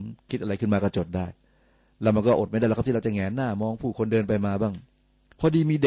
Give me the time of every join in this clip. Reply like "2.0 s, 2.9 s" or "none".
none